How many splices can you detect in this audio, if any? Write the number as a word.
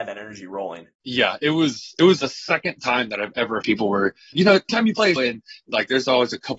six